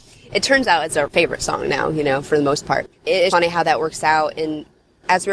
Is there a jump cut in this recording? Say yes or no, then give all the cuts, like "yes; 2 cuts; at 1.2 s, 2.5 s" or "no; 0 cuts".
yes; 1 cut; at 3.3 s